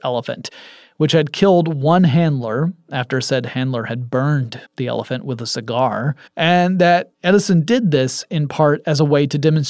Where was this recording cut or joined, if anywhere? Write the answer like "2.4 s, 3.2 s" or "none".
4.7 s, 6.3 s, 7.1 s